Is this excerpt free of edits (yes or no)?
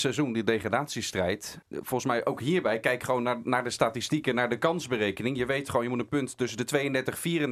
no